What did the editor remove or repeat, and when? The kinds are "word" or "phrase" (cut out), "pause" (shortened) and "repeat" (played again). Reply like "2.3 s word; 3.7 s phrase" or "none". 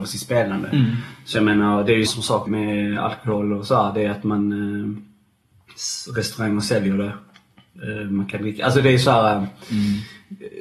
2.1 s word; 2.5 s word

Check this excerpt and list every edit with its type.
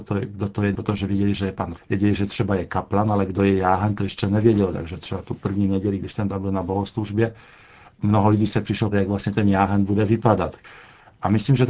1.8 s word; 4.0 s word; 8.9 s word

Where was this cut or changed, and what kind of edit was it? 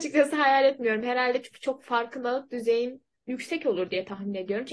none

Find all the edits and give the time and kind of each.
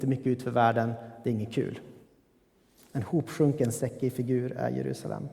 none

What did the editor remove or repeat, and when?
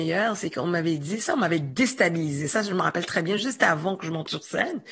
none

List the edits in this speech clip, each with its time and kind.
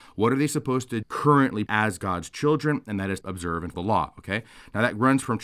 1.0 s word; 1.7 s word; 3.2 s word; 3.7 s word

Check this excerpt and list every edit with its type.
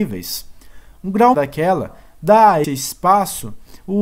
1.3 s word; 2.6 s word

